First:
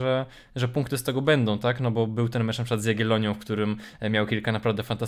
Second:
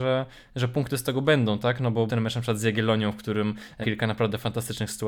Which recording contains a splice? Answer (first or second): second